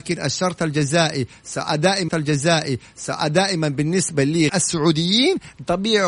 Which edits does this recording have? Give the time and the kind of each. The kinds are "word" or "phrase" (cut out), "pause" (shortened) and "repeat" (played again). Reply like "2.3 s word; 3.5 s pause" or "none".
2.1 s repeat; 4.5 s word